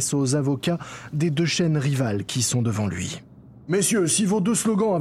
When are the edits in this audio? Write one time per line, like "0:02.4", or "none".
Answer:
0:03.6